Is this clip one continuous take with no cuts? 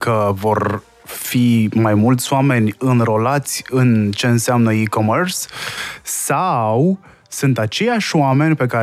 yes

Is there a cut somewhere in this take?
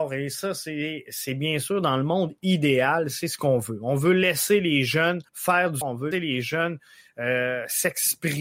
yes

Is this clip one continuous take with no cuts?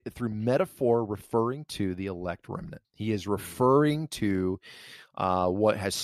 no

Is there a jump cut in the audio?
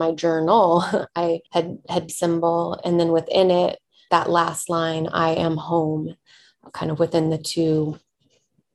yes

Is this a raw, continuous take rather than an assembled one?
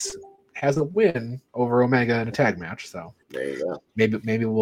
no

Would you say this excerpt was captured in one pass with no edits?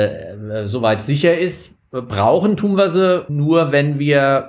no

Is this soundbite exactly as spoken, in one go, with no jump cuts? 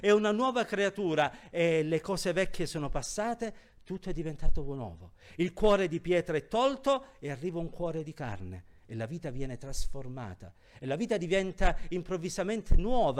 yes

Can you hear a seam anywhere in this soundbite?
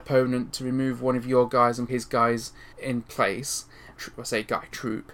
yes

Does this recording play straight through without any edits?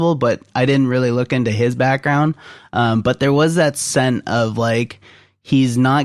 yes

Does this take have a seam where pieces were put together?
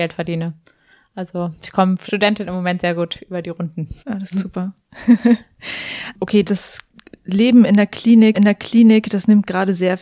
yes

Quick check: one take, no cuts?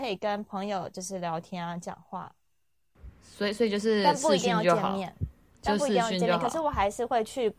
no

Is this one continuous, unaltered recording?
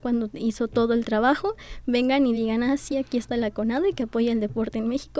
yes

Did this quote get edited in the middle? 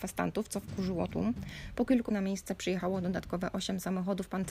yes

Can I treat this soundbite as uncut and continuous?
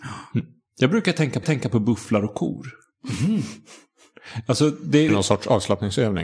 no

